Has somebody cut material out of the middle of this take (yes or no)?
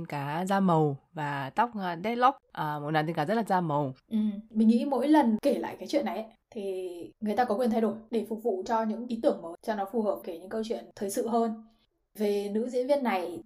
yes